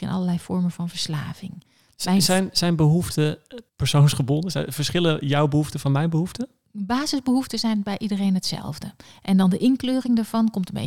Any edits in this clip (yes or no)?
yes